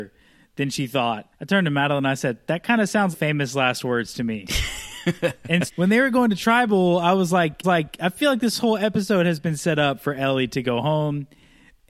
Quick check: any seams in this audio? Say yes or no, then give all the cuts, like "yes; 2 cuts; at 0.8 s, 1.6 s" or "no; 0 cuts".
yes; 4 cuts; at 1.3 s, 3.1 s, 5.7 s, 7.6 s